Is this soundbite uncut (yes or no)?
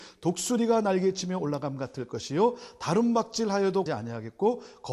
no